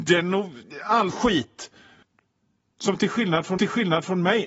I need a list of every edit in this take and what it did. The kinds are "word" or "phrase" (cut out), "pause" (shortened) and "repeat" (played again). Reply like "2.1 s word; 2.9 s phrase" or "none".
1.1 s word; 2.0 s pause; 3.6 s repeat